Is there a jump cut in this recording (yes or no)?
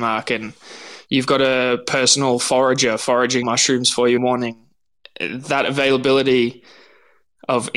yes